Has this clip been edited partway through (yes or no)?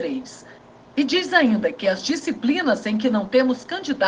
no